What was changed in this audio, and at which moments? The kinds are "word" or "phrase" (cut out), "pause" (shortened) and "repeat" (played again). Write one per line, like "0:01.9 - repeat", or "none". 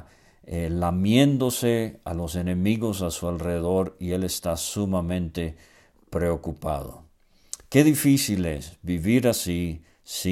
none